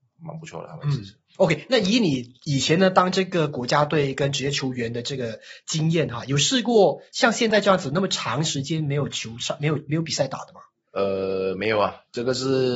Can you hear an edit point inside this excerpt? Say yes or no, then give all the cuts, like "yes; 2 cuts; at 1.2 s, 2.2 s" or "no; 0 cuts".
no; 0 cuts